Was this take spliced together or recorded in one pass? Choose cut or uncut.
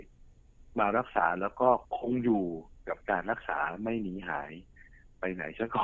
cut